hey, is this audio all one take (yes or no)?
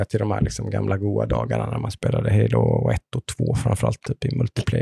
yes